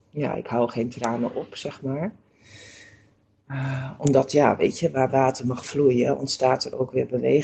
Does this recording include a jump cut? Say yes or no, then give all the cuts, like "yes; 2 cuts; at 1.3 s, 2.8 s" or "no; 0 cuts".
no; 0 cuts